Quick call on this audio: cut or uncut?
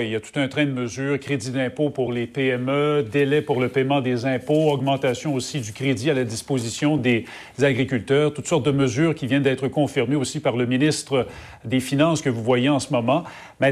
uncut